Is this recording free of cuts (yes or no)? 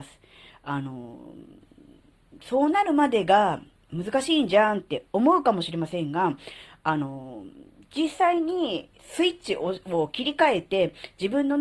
no